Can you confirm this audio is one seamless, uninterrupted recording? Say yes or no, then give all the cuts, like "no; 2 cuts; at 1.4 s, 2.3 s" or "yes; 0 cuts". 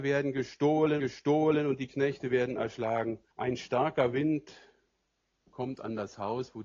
no; 2 cuts; at 1.0 s, 3.3 s